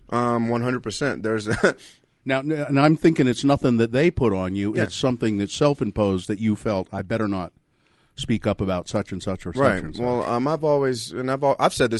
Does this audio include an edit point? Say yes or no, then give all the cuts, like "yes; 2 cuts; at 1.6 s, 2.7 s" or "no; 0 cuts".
no; 0 cuts